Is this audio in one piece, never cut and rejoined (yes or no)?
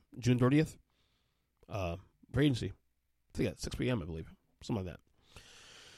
no